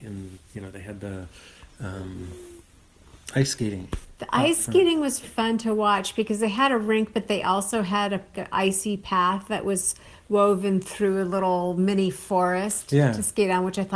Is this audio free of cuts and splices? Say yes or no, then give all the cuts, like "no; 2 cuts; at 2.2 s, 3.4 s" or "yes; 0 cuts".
no; 2 cuts; at 5.2 s, 8.3 s